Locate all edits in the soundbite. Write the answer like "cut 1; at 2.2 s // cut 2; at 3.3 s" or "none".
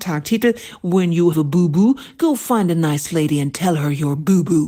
cut 1; at 1.3 s